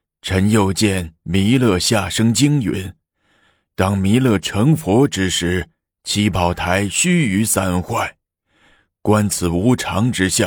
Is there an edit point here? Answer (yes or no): no